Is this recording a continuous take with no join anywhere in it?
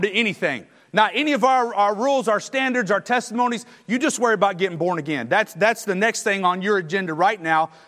yes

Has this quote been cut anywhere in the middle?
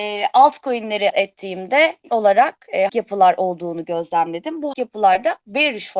yes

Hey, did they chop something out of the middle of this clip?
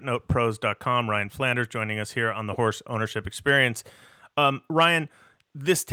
no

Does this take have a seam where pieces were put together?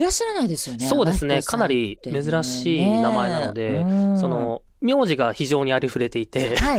yes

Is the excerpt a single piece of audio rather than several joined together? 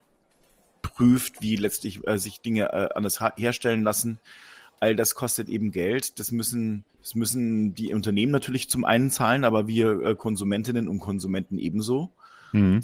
no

